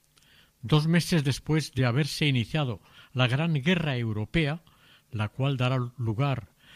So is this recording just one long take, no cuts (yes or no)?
yes